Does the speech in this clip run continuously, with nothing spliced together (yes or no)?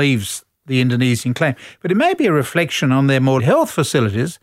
no